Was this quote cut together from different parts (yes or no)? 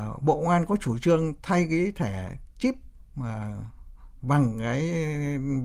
no